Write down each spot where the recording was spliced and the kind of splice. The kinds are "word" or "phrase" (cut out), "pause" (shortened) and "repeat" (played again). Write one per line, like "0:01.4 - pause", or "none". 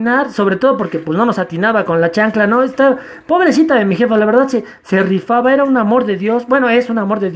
none

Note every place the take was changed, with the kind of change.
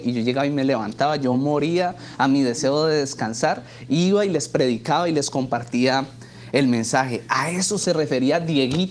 none

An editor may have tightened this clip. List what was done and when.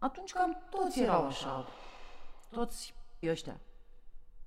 0:03.2 - word

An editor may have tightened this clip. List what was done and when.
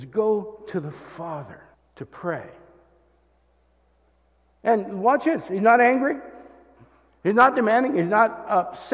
0:01.7 - pause

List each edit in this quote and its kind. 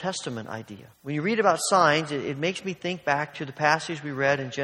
0:00.9 - pause

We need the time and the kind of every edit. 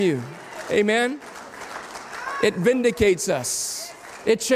none

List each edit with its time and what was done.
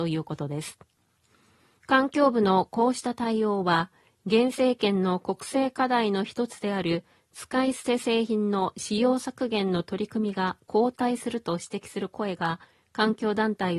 none

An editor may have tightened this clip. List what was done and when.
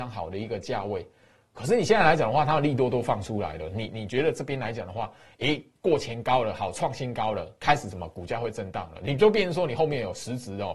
none

